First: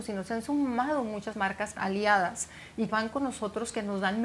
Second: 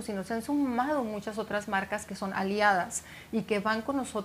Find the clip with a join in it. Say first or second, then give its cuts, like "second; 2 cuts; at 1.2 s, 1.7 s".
first; 3 cuts; at 1.3 s, 1.8 s, 2.9 s